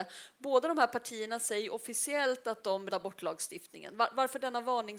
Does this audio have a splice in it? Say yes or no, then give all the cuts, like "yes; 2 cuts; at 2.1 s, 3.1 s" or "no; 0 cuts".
yes; 1 cut; at 2.9 s